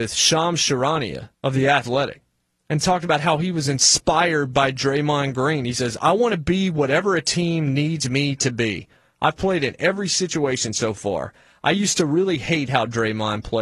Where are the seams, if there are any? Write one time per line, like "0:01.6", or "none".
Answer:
0:01.3